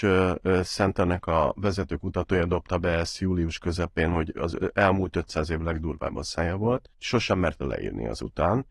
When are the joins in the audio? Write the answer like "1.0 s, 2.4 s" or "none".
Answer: 6.9 s